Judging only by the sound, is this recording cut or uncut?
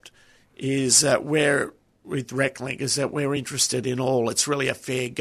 uncut